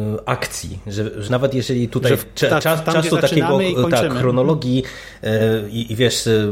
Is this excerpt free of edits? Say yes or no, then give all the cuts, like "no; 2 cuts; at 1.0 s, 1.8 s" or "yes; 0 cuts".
no; 1 cut; at 1.3 s